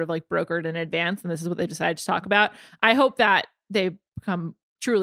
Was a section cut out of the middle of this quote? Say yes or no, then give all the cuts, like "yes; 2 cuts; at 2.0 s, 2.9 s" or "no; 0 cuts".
no; 0 cuts